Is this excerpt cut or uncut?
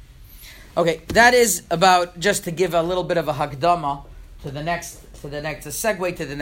uncut